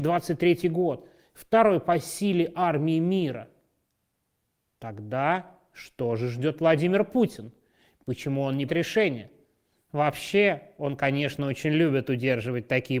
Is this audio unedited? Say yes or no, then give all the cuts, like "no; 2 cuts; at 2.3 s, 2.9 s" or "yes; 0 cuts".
no; 1 cut; at 8.7 s